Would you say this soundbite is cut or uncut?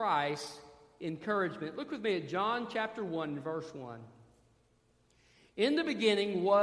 uncut